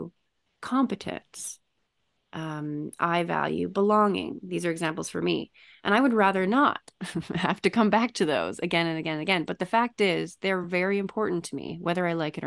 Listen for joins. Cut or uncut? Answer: uncut